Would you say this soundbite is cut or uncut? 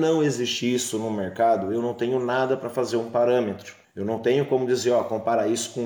cut